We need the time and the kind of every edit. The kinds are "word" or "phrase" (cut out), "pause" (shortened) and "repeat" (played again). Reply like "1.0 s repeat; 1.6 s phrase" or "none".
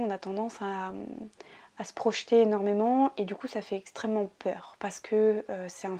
none